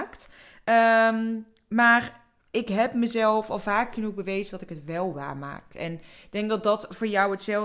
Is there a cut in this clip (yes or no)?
no